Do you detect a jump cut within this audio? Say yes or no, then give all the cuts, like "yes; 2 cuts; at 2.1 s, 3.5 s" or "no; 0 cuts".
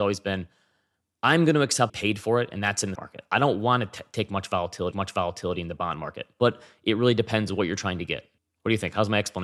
yes; 4 cuts; at 1.9 s, 2.9 s, 4.9 s, 8.4 s